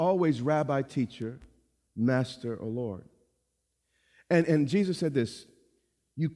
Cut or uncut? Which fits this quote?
uncut